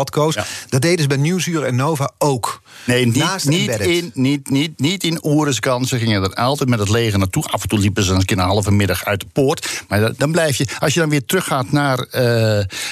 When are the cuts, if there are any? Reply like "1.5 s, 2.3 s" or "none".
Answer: none